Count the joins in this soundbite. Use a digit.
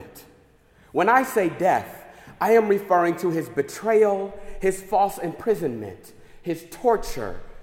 0